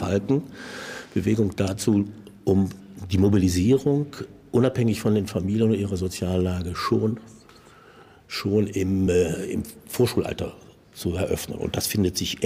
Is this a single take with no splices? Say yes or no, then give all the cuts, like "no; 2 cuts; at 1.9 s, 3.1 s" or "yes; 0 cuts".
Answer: yes; 0 cuts